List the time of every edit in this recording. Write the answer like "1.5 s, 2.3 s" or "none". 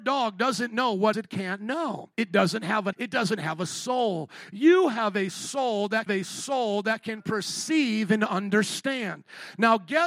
1.1 s, 2.1 s, 2.9 s, 6.1 s